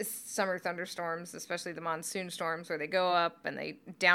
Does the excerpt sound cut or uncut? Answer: uncut